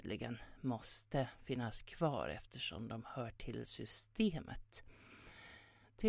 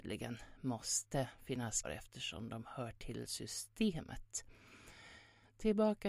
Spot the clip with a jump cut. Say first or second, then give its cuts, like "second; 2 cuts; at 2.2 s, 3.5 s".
second; 1 cut; at 1.8 s